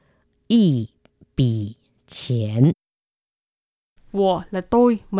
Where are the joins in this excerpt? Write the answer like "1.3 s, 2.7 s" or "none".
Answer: none